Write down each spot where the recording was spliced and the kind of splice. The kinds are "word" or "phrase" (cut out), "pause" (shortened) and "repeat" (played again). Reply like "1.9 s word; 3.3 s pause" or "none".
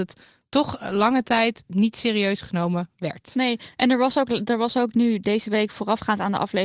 none